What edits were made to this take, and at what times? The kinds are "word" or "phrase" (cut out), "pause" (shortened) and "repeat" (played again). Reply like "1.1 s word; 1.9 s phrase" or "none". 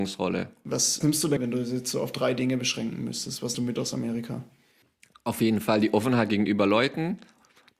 1.0 s word; 1.4 s word; 3.5 s word